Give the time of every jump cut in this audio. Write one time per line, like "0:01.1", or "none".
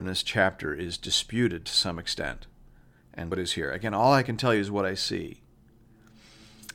0:03.3